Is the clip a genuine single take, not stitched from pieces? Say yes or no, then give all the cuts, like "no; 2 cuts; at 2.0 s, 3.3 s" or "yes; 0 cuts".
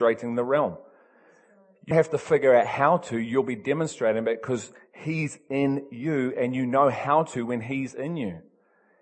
no; 1 cut; at 1.9 s